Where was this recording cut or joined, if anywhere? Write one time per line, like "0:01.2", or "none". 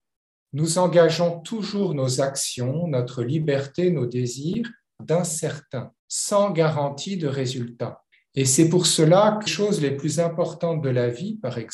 0:05.0
0:06.0
0:08.1
0:09.5

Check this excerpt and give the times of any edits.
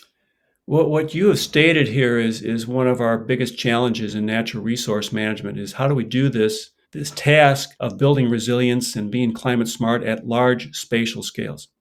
0:06.8
0:07.8

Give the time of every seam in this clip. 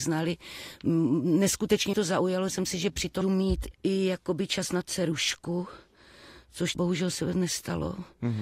0:01.9
0:02.5
0:03.2
0:03.7
0:04.8
0:06.7

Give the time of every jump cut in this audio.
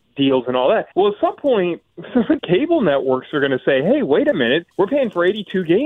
0:00.9
0:02.4
0:04.7

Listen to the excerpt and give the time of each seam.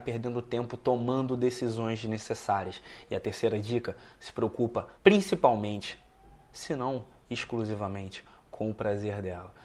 0:04.9

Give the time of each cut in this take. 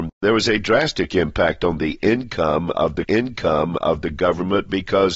0:03.0

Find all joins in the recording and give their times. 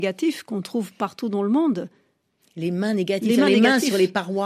none

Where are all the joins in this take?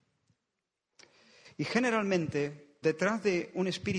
0:02.8

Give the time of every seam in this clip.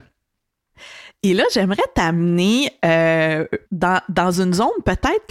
0:03.7

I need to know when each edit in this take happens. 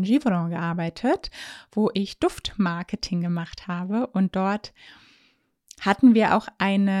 none

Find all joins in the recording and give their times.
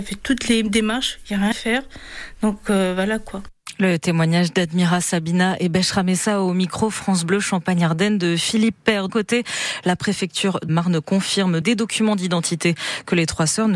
0:01.5
0:09.1
0:10.7
0:11.6

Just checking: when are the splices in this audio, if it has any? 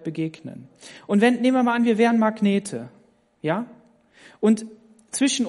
none

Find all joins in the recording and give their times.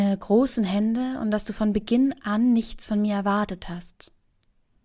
none

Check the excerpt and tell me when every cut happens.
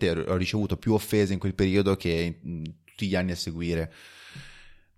none

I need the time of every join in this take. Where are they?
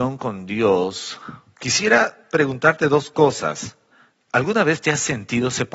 0:03.9

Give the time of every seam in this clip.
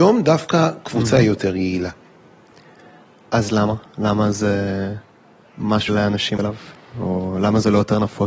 0:05.9
0:06.4

